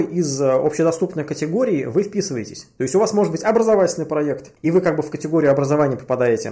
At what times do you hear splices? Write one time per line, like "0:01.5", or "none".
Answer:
none